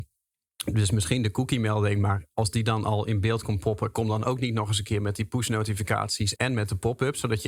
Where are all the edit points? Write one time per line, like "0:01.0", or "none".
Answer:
0:06.4